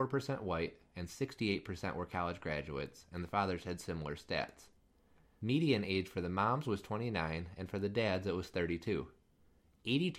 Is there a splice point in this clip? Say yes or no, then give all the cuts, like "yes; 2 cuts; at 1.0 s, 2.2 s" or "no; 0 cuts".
no; 0 cuts